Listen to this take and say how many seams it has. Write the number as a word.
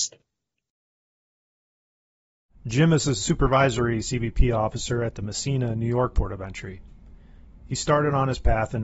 zero